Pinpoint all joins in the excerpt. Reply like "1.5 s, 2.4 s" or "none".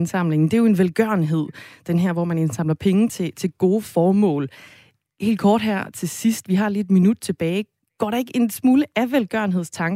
none